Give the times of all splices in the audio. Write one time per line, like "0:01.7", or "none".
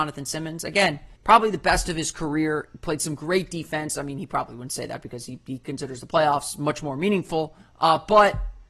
0:01.2
0:07.6